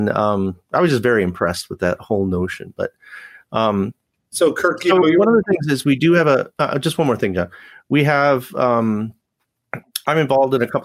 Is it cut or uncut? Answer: uncut